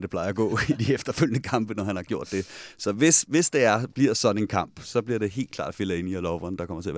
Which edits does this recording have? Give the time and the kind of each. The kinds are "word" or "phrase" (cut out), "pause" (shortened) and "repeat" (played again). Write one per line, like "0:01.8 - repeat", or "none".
none